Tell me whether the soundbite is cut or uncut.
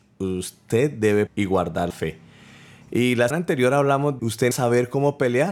cut